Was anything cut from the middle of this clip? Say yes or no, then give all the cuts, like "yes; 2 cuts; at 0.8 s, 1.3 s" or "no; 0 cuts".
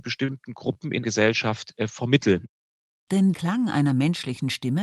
yes; 2 cuts; at 1.0 s, 3.3 s